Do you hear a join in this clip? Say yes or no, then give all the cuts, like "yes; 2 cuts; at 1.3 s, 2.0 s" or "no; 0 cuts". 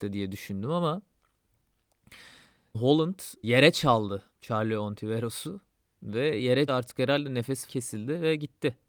yes; 5 cuts; at 2.7 s, 3.4 s, 4.3 s, 6.7 s, 7.7 s